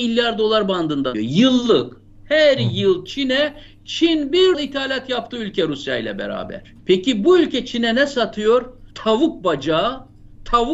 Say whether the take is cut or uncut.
cut